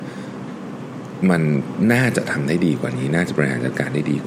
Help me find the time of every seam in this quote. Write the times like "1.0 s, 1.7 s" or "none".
1.2 s